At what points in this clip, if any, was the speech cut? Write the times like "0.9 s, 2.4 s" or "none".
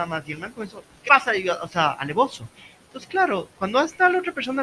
1.1 s, 3.5 s